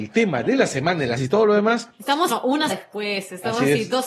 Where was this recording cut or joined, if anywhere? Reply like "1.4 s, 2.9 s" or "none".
1.2 s, 2.3 s, 2.7 s